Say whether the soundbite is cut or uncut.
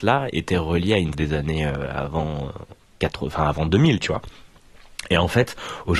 cut